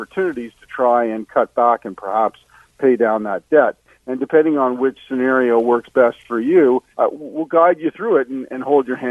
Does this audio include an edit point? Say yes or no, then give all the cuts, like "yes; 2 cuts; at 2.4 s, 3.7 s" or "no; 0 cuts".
yes; 1 cut; at 6.9 s